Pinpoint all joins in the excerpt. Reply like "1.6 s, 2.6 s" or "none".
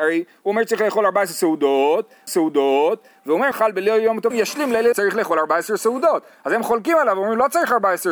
2.3 s, 3.5 s, 4.3 s, 4.9 s